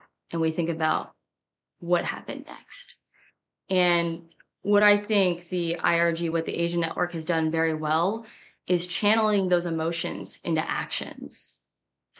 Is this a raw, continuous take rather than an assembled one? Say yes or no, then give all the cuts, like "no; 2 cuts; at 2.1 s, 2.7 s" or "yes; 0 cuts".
yes; 0 cuts